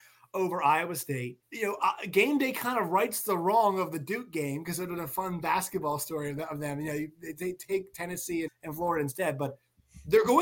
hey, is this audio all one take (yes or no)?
no